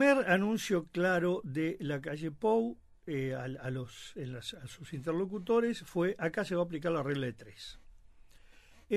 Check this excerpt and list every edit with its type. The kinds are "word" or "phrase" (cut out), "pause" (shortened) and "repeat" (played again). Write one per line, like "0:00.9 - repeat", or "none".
none